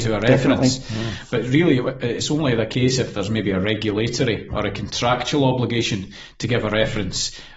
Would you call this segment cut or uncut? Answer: uncut